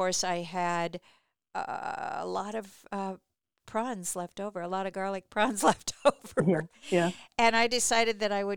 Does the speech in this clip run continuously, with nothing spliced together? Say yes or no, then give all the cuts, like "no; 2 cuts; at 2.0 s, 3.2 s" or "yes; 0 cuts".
yes; 0 cuts